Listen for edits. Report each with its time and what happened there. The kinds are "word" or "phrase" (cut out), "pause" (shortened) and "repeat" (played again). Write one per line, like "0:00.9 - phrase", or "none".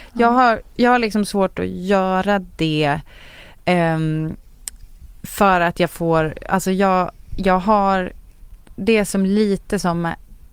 none